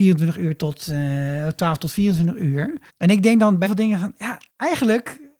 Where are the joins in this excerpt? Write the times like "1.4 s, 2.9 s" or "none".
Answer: 2.9 s, 3.7 s, 4.5 s